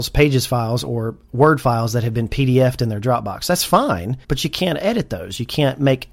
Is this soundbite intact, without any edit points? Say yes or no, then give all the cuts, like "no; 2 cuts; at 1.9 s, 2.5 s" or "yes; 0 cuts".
no; 1 cut; at 4.2 s